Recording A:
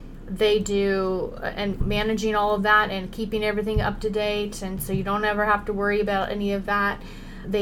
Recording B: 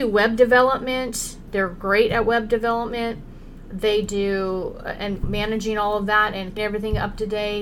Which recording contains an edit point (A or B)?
B